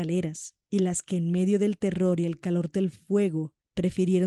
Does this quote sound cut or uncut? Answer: uncut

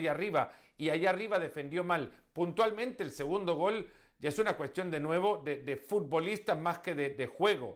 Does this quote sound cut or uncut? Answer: uncut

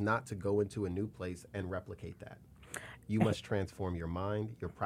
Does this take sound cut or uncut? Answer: uncut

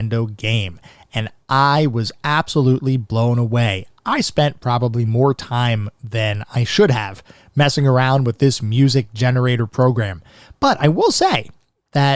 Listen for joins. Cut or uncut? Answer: uncut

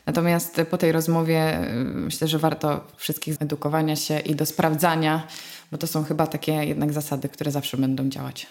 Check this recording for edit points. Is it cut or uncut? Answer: cut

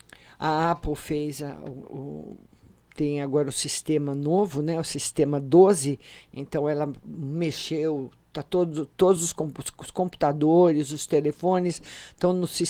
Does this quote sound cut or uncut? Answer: uncut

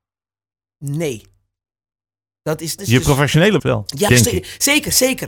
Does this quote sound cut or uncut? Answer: cut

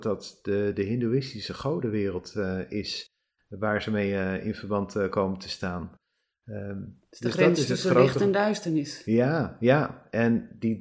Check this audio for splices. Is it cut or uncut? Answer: uncut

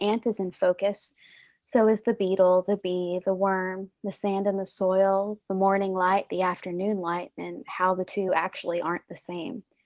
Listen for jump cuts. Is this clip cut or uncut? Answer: uncut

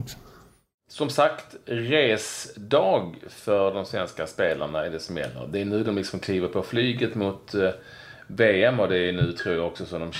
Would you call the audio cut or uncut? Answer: uncut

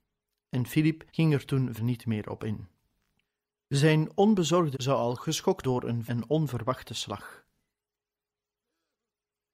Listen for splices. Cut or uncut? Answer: cut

